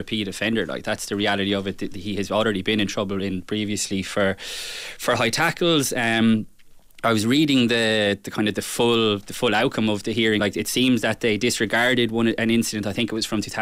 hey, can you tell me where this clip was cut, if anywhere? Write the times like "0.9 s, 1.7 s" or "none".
10.4 s